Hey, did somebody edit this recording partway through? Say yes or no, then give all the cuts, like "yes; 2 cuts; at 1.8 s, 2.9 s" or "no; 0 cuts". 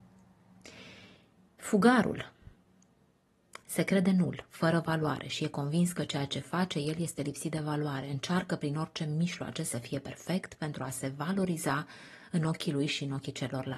no; 0 cuts